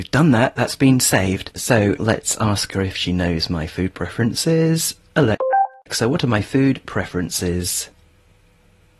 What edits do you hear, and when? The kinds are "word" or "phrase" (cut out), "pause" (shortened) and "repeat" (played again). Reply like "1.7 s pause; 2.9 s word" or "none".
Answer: 2.0 s word